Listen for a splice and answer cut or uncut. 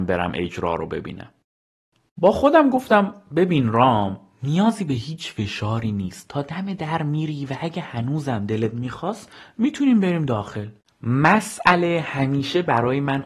uncut